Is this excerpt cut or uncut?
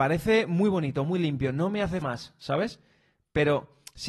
cut